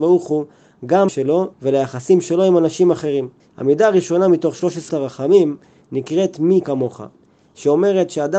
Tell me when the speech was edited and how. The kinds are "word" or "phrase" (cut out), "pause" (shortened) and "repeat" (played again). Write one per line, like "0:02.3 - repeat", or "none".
0:01.1 - word
0:01.5 - pause
0:03.4 - pause
0:04.9 - word
0:06.6 - word